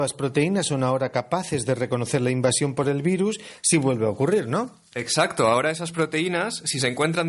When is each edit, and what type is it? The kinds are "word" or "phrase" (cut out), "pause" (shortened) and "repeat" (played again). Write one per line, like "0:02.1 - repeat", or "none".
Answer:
none